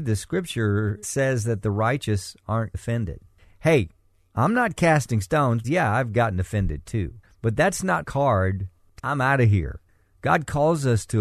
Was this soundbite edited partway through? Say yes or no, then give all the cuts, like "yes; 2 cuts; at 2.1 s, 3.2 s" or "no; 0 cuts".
yes; 5 cuts; at 1.0 s, 2.7 s, 5.6 s, 8.0 s, 9.0 s